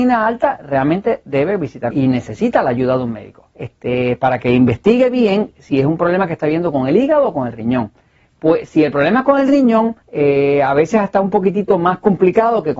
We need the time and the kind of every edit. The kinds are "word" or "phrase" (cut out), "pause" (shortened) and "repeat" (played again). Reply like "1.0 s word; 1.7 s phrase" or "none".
1.9 s phrase; 3.5 s pause; 10.0 s pause